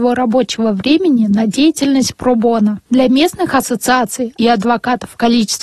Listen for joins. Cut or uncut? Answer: cut